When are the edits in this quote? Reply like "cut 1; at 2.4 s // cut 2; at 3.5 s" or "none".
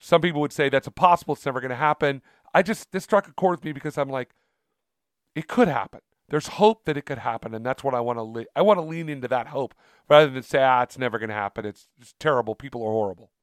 none